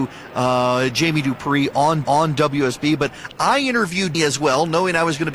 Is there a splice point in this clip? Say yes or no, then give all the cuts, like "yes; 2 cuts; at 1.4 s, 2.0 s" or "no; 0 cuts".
yes; 2 cuts; at 2.0 s, 4.1 s